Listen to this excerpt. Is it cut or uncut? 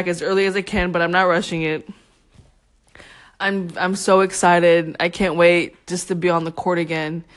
uncut